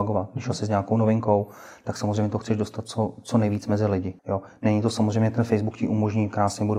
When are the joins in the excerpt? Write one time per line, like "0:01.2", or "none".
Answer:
0:04.2